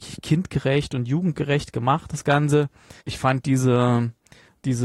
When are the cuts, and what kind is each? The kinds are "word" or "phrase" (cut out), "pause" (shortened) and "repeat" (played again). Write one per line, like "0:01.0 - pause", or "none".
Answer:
0:03.0 - pause